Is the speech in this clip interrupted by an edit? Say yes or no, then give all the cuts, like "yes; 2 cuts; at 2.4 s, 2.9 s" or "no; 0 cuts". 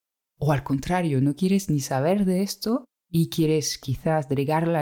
yes; 1 cut; at 2.9 s